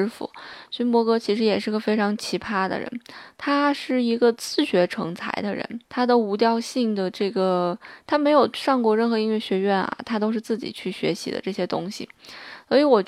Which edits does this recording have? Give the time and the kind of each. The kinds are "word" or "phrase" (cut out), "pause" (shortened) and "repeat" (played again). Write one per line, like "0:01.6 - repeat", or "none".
0:05.8 - pause